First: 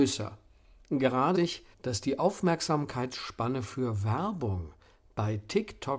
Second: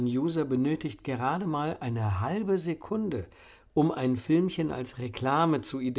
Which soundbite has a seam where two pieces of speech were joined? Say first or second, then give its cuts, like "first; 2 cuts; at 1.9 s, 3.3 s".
first; 2 cuts; at 1.3 s, 1.7 s